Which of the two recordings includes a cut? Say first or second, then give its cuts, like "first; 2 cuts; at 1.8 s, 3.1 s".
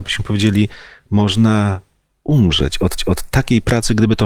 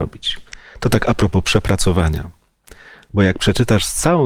first; 1 cut; at 3.0 s